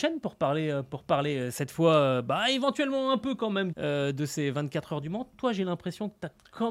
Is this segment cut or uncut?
cut